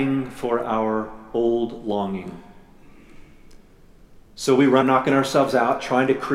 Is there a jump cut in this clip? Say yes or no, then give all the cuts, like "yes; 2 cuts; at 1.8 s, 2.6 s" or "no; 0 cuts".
yes; 1 cut; at 4.8 s